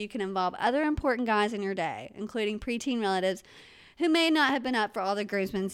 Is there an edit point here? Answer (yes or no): no